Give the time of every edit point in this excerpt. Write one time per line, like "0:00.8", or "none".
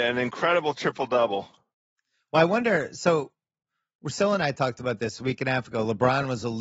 none